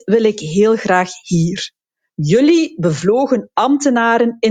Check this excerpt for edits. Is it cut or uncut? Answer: uncut